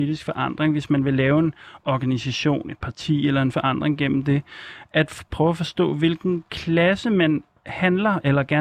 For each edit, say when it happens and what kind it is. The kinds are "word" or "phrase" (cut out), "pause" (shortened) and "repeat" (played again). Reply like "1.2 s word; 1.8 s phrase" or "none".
3.5 s phrase